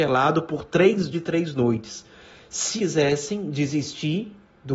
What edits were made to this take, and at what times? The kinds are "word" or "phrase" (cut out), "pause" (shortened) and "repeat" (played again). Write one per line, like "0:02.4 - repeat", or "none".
0:01.1 - word
0:02.8 - word